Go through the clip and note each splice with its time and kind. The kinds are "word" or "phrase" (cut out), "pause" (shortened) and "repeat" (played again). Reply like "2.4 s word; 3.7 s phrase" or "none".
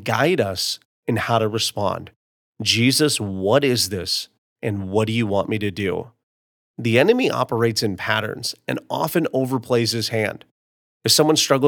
none